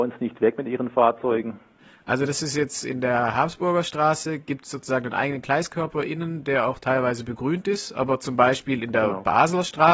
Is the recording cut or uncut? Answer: uncut